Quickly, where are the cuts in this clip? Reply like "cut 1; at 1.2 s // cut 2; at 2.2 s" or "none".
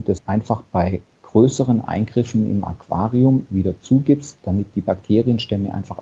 none